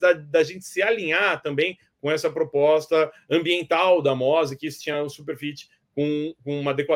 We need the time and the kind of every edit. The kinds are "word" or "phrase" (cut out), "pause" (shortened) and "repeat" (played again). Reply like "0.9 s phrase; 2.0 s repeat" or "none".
none